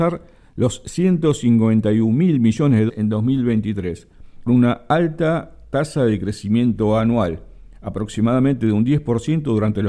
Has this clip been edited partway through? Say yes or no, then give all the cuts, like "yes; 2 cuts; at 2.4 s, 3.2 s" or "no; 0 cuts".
yes; 2 cuts; at 2.9 s, 4.5 s